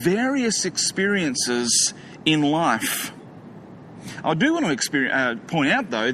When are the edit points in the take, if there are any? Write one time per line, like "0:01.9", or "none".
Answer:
none